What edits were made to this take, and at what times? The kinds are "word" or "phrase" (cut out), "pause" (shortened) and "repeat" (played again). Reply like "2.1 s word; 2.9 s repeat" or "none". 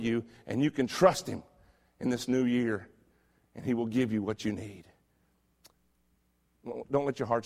none